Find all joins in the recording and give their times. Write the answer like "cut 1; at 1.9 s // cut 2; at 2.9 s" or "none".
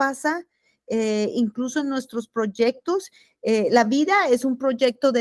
none